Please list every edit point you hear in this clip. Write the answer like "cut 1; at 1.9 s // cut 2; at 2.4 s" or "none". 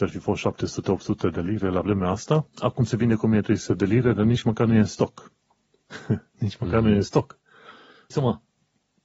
cut 1; at 2.5 s // cut 2; at 8.1 s